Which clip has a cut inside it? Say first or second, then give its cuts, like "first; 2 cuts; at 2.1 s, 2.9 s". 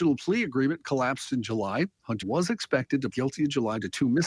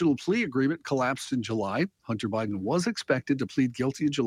first; 2 cuts; at 2.2 s, 3.1 s